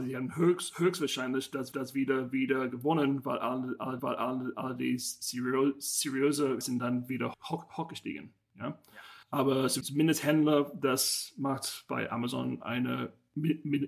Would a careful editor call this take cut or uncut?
cut